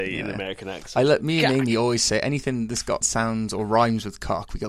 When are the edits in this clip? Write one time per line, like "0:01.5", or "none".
0:03.0